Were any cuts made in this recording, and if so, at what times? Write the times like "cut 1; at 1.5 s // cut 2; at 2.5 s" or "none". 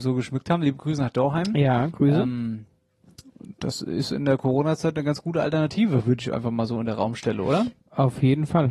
cut 1; at 7.8 s